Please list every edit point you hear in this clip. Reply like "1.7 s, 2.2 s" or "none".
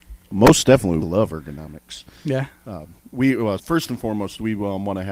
1.0 s, 3.6 s